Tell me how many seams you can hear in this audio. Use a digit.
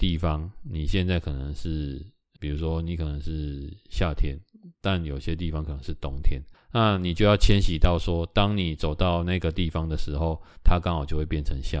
2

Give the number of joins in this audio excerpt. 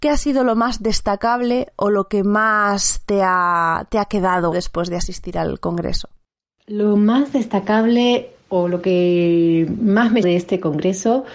2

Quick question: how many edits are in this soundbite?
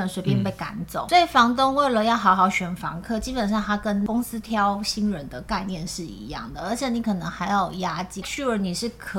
1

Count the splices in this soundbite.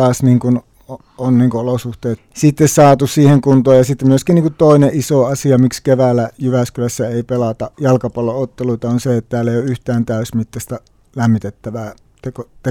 2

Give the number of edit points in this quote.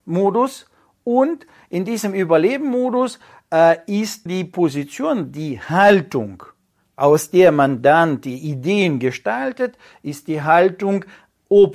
1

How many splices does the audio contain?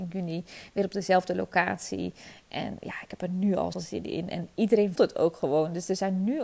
2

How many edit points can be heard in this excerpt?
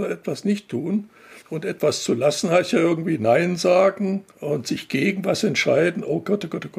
2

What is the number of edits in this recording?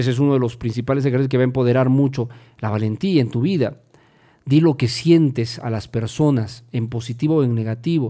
0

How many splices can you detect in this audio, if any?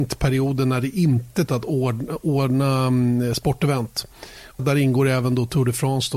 2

